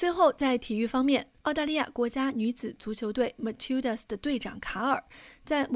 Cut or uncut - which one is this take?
cut